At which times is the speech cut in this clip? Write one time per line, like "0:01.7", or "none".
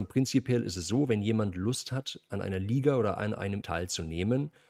0:03.6